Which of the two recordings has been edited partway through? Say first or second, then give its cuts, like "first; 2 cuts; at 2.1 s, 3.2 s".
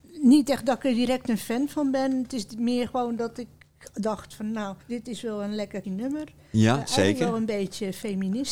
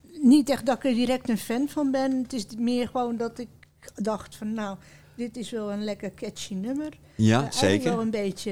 first; 2 cuts; at 4.8 s, 5.8 s